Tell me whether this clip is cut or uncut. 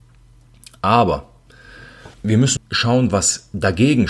cut